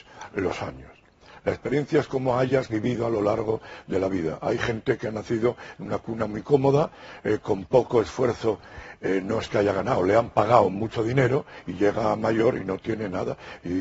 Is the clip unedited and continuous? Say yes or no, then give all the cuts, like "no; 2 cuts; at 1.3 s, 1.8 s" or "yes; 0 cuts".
yes; 0 cuts